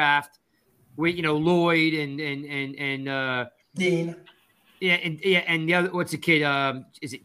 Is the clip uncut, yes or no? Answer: yes